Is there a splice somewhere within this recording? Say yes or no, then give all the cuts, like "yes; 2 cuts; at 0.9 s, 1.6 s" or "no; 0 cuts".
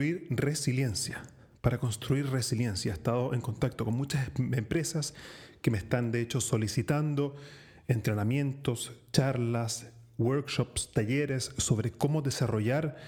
no; 0 cuts